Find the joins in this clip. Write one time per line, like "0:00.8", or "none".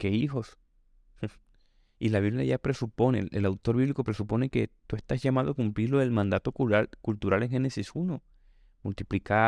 none

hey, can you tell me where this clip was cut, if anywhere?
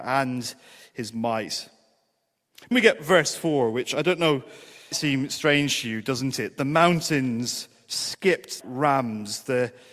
0:02.7
0:04.9
0:08.6

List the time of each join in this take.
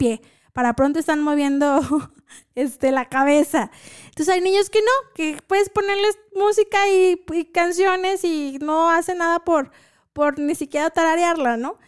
none

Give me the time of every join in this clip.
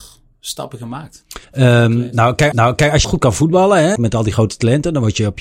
0:01.4
0:02.5
0:03.0
0:04.0

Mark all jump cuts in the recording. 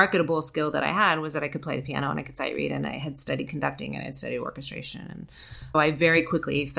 0:05.7

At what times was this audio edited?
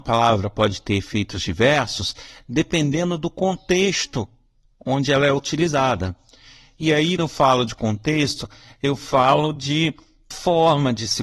0:07.2
0:10.3

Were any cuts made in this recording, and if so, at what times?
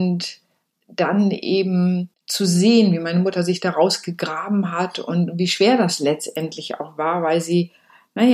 0:02.2

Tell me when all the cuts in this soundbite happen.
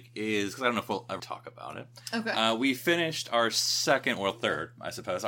0:01.2

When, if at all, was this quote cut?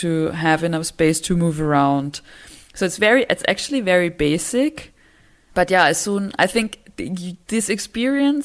none

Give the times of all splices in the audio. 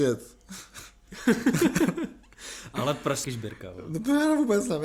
0:03.2

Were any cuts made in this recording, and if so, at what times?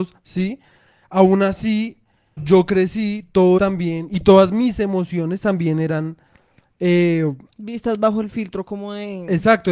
0:02.4
0:03.6

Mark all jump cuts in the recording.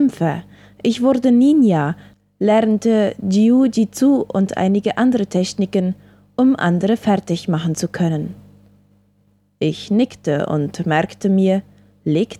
none

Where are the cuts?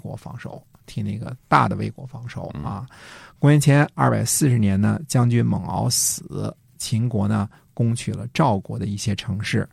none

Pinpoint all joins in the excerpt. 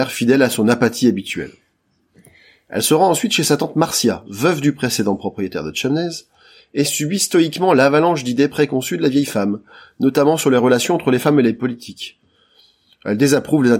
none

